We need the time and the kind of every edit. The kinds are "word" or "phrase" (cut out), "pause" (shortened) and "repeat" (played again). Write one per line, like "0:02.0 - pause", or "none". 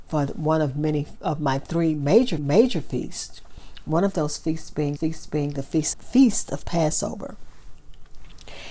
0:02.4 - repeat
0:05.0 - repeat
0:05.9 - word